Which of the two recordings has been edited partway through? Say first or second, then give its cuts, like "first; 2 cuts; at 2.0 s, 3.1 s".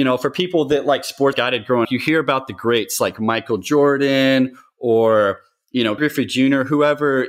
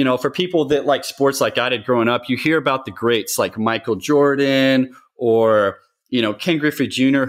first; 3 cuts; at 1.3 s, 1.8 s, 6.0 s